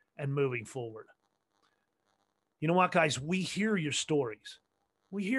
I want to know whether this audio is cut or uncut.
uncut